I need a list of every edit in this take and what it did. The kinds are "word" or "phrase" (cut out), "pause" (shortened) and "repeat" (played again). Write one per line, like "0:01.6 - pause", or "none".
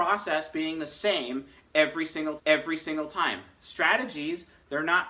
0:02.4 - repeat